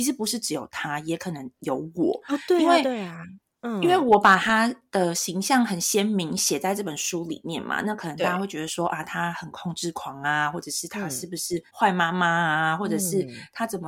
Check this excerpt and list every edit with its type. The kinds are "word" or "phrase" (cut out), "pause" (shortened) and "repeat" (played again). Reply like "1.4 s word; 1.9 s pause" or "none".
11.7 s pause